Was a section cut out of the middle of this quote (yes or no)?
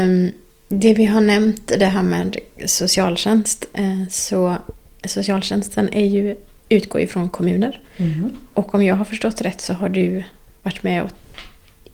no